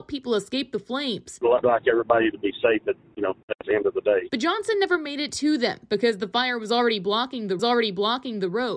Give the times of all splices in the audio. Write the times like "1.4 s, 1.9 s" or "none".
1.6 s, 7.6 s